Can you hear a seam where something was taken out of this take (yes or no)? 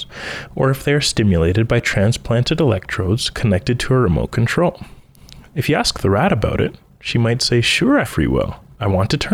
yes